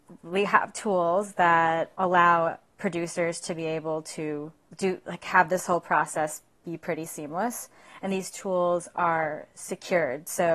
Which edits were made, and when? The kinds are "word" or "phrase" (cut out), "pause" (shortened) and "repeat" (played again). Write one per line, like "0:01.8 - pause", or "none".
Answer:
none